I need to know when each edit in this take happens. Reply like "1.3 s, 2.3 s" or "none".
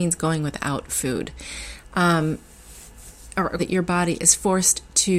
3.6 s